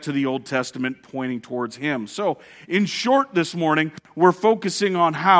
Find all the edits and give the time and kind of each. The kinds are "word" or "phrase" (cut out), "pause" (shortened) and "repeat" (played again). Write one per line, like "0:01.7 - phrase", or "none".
none